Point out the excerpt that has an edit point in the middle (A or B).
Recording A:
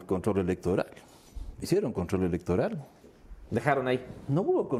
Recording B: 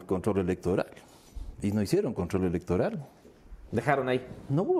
A